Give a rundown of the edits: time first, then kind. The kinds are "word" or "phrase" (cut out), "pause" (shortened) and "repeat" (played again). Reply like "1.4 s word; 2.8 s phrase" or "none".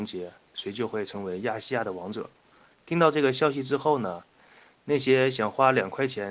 none